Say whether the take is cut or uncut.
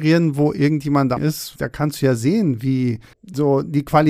cut